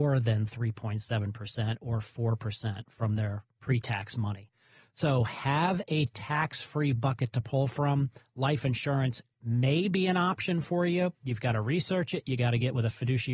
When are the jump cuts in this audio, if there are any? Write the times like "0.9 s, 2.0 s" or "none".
none

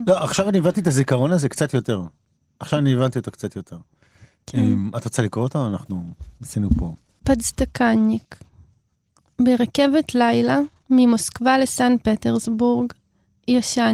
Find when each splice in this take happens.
none

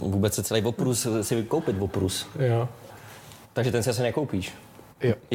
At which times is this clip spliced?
none

